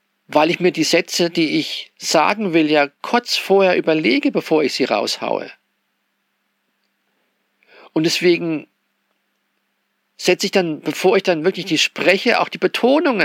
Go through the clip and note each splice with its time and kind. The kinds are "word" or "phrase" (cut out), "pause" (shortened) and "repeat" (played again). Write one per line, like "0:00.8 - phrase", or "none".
none